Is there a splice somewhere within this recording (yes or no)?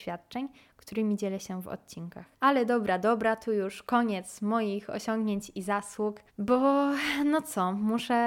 yes